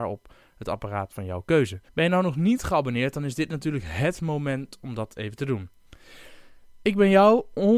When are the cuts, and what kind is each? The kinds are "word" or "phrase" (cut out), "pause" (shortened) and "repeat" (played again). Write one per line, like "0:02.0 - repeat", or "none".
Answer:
0:01.9 - pause